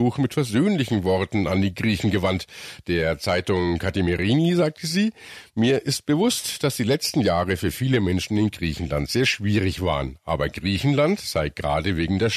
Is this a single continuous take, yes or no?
yes